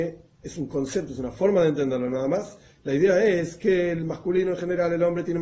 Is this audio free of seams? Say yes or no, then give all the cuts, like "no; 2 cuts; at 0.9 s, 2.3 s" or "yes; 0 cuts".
yes; 0 cuts